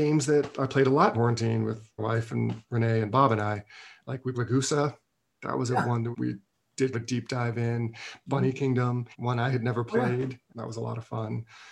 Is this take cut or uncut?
cut